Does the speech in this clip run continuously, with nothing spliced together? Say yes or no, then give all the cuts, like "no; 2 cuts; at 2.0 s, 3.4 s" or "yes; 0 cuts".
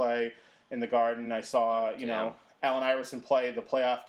yes; 0 cuts